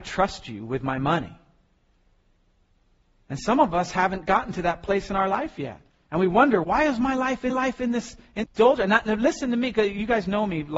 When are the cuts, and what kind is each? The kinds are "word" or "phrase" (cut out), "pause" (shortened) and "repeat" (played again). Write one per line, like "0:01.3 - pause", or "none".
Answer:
0:06.6 - word
0:07.5 - repeat
0:08.4 - word